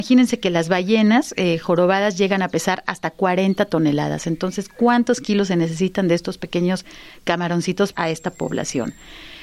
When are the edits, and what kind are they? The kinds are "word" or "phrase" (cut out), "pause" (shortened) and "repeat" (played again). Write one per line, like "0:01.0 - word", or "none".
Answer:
0:07.9 - phrase